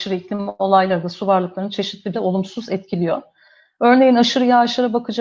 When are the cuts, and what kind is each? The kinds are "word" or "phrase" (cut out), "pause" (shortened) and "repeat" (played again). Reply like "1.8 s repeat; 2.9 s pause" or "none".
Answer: 2.1 s word